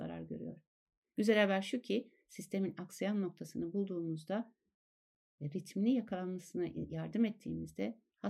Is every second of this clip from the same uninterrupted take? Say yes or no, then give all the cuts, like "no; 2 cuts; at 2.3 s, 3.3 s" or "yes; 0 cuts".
yes; 0 cuts